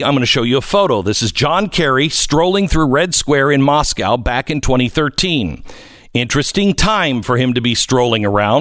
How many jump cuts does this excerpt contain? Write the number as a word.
zero